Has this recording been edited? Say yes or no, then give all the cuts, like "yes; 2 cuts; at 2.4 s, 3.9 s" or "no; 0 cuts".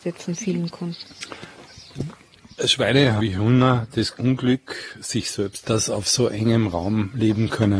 yes; 3 cuts; at 3.2 s, 4.1 s, 5.6 s